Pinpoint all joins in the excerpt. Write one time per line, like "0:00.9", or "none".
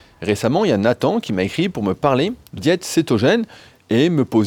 0:02.6

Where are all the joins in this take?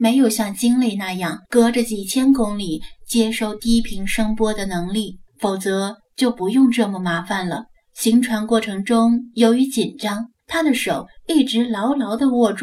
0:01.4
0:05.3
0:07.7
0:10.4

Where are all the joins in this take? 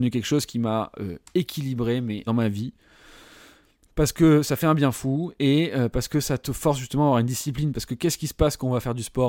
0:02.3

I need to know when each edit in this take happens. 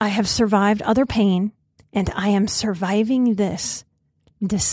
0:01.8

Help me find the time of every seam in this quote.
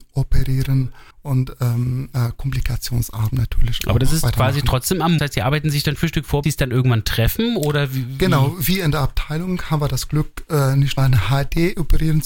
0:01.1
0:05.2
0:06.0
0:06.4
0:11.0

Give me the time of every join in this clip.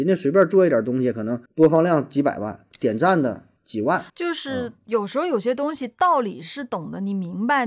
0:01.5
0:03.6
0:04.1

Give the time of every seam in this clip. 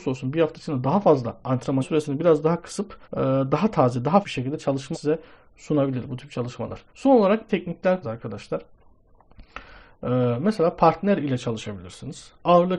0:01.8
0:03.0
0:04.2
0:04.9
0:06.9
0:07.5
0:08.0

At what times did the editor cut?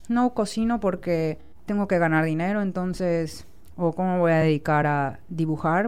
none

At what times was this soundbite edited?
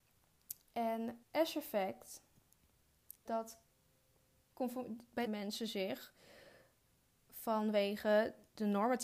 0:01.2
0:03.3
0:05.3

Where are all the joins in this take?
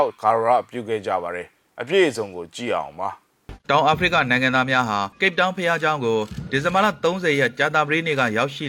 0:05.1

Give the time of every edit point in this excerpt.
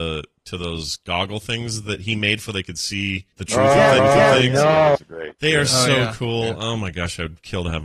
0:02.5
0:03.3
0:04.0

